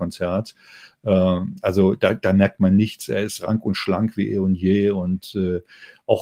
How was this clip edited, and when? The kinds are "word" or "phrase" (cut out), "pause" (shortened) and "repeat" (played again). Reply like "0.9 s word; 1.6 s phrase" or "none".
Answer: none